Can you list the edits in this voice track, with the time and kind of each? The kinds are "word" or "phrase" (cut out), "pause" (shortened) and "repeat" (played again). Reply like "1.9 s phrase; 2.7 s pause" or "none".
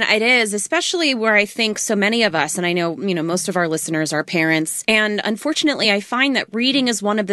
none